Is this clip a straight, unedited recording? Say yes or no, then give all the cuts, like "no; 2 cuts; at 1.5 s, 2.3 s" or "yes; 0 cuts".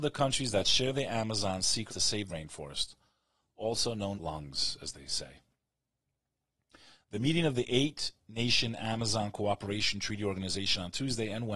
no; 3 cuts; at 1.9 s, 2.3 s, 4.1 s